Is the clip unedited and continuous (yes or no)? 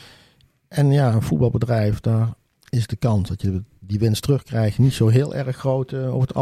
yes